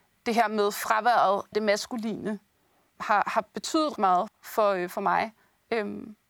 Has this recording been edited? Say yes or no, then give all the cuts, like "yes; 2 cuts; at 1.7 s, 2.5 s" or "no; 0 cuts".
yes; 5 cuts; at 1.5 s, 2.9 s, 3.2 s, 4.0 s, 4.3 s